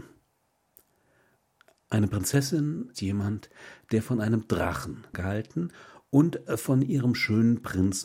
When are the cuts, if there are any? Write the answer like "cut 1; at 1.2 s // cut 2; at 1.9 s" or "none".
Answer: cut 1; at 2.9 s // cut 2; at 5.1 s